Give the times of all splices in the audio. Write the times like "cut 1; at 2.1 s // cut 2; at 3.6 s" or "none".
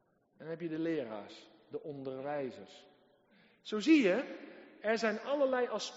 none